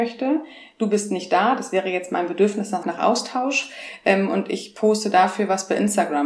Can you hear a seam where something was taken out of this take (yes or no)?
yes